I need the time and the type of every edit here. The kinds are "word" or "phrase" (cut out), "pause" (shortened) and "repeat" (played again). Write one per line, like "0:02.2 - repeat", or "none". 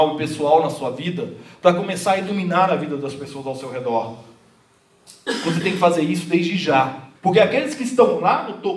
0:07.2 - pause